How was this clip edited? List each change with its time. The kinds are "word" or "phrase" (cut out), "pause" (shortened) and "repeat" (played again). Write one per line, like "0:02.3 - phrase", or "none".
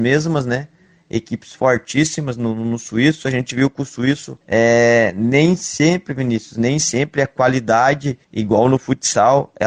0:04.4 - pause
0:08.2 - pause